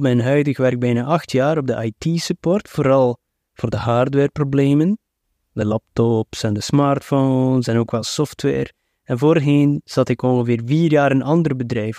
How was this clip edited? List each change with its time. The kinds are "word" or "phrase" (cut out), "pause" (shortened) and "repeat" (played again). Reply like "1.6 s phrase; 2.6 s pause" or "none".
none